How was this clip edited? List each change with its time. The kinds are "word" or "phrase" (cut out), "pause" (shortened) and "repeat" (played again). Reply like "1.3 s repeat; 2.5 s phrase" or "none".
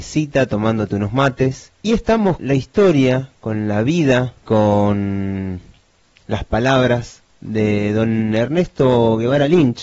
1.7 s pause; 2.4 s word; 4.4 s word